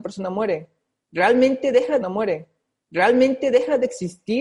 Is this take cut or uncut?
cut